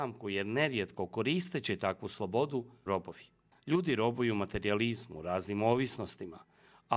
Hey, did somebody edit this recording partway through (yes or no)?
yes